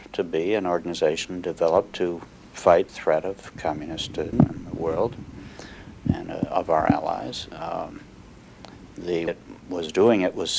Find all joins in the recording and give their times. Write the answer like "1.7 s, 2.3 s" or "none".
2.9 s, 4.3 s, 9.3 s